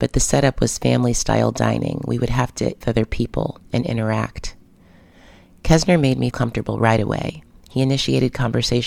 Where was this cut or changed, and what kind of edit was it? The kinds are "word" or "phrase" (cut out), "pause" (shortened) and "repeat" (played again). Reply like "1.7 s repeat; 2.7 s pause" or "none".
2.8 s phrase; 3.6 s pause; 6.3 s word